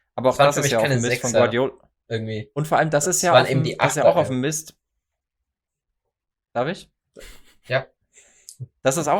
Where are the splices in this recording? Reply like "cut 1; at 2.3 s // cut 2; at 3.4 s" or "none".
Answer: none